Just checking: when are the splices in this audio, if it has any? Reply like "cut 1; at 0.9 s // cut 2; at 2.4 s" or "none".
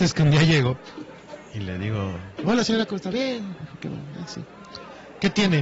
none